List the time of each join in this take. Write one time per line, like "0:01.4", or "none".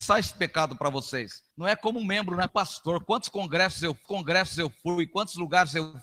0:01.5
0:02.5
0:04.0